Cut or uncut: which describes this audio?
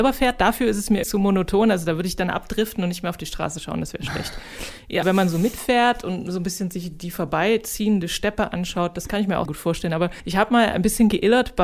cut